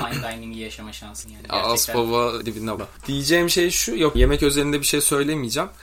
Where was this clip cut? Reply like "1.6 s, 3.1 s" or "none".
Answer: 1.2 s, 2.4 s, 2.8 s, 4.1 s